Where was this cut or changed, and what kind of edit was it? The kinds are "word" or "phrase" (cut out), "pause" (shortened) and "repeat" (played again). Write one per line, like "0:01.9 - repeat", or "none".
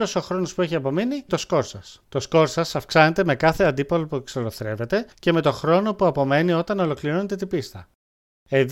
0:01.3 - phrase
0:02.0 - pause
0:05.1 - pause